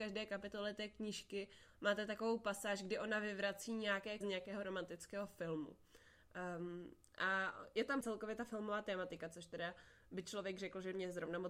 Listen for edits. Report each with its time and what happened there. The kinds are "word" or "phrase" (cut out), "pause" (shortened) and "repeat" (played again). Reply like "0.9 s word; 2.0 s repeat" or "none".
4.2 s word; 8.0 s word